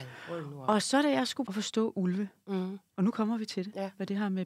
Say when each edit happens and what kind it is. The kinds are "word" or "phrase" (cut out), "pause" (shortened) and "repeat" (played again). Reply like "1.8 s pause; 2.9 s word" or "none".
1.5 s phrase